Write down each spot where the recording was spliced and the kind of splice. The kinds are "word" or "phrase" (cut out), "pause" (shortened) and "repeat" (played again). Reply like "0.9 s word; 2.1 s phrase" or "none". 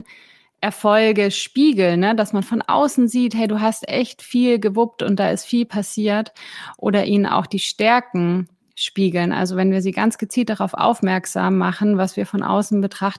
none